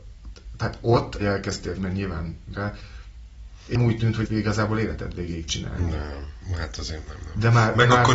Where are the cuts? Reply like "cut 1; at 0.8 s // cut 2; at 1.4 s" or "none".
cut 1; at 1.2 s // cut 2; at 1.8 s // cut 3; at 2.5 s // cut 4; at 3.7 s // cut 5; at 4.2 s // cut 6; at 5.5 s // cut 7; at 7.1 s